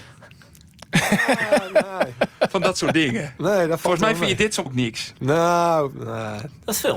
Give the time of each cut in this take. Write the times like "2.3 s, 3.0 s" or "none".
4.7 s